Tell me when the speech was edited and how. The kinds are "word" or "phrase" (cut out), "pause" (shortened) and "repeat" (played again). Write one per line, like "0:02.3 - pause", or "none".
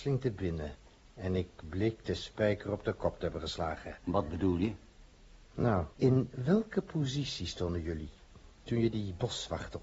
0:05.9 - pause